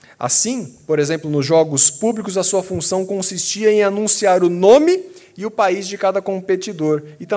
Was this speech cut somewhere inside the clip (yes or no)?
no